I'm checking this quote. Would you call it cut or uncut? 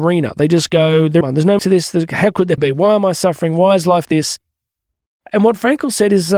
cut